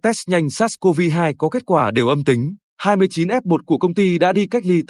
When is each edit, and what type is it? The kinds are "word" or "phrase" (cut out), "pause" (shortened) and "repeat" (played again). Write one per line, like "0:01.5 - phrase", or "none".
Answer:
0:02.7 - pause